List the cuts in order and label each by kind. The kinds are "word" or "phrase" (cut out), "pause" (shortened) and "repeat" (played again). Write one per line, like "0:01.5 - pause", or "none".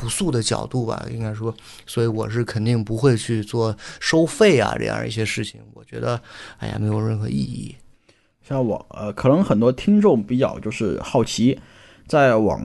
none